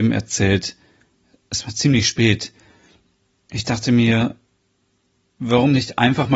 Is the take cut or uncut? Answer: uncut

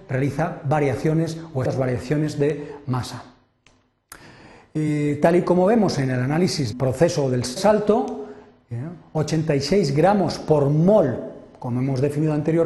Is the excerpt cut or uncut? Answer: cut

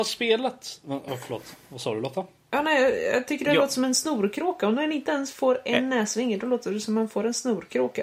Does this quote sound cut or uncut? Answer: uncut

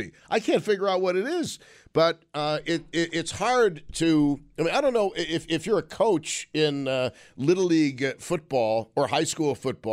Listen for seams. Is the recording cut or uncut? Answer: uncut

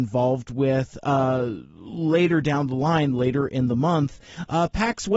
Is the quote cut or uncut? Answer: uncut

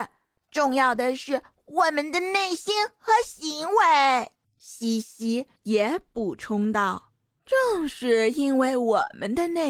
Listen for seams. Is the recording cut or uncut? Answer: cut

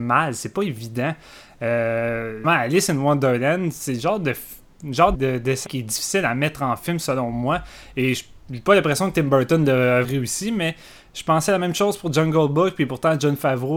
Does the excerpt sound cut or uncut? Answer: cut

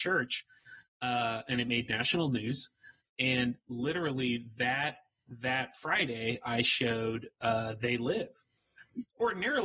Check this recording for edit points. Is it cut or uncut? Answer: uncut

